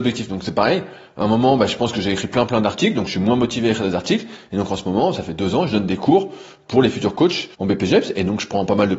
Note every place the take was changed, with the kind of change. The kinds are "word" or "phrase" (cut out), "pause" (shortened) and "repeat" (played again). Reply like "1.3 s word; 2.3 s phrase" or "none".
7.5 s pause